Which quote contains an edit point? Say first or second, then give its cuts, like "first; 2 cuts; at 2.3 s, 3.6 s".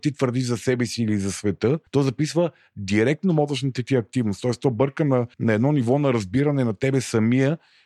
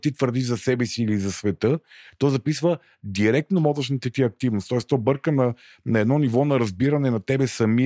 first; 2 cuts; at 1.9 s, 5.3 s